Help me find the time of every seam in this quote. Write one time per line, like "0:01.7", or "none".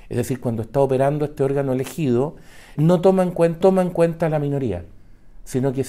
0:02.8
0:03.6